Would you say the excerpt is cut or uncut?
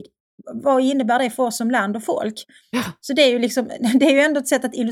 uncut